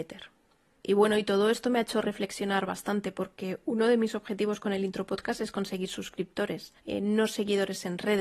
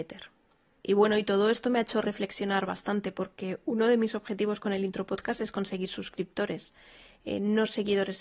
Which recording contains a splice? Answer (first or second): first